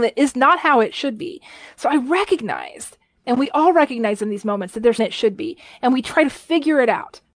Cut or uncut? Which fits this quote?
cut